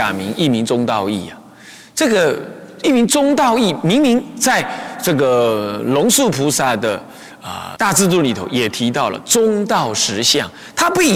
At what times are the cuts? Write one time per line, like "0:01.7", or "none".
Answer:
0:07.8